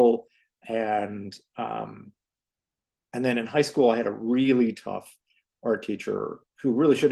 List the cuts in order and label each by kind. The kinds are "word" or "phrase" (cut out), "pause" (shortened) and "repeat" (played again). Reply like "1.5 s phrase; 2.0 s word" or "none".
none